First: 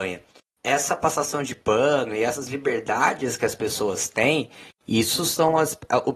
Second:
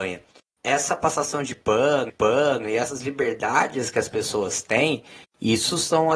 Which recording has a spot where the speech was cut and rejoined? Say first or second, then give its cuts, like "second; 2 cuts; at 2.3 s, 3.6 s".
second; 1 cut; at 2.1 s